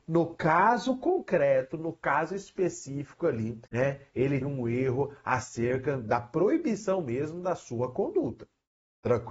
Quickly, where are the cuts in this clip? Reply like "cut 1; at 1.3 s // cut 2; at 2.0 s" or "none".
cut 1; at 3.7 s // cut 2; at 4.4 s

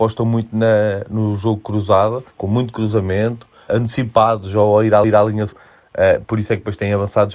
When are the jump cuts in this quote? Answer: cut 1; at 2.3 s // cut 2; at 3.7 s // cut 3; at 5.0 s // cut 4; at 5.5 s

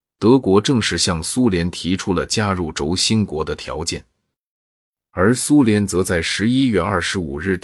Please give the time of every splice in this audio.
none

